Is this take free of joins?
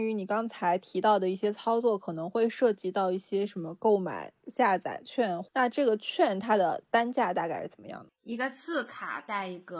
yes; 0 cuts

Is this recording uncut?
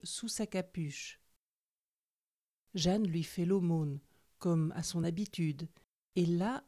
yes; 0 cuts

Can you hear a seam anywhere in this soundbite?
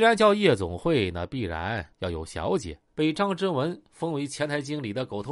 yes; 2 cuts; at 1.9 s, 2.9 s

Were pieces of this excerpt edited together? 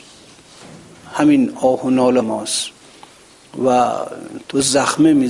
yes; 1 cut; at 2.2 s

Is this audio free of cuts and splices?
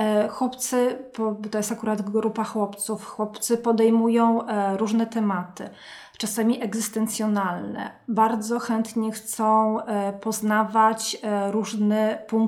yes; 0 cuts

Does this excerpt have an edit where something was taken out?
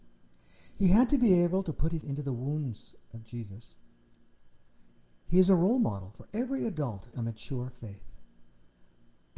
yes; 2 cuts; at 2.0 s, 7.1 s

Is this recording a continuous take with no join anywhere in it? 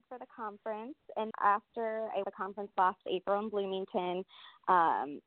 no; 2 cuts; at 1.3 s, 2.2 s

